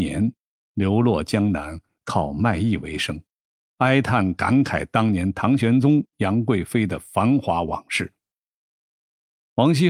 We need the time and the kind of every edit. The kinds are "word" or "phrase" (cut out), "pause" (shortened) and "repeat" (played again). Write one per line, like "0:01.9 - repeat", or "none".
none